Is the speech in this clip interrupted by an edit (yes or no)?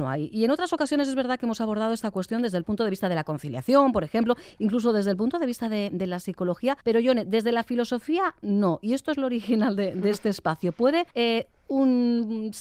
yes